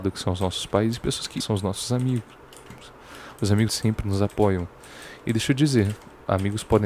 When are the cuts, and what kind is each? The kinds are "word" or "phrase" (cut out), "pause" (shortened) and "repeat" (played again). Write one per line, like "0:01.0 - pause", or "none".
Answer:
0:01.4 - phrase
0:03.7 - word